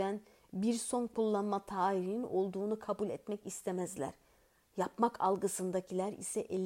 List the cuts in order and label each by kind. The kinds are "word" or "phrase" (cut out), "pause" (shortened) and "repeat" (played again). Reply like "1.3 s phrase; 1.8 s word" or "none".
none